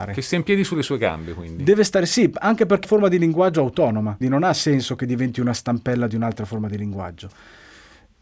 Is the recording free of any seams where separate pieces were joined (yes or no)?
no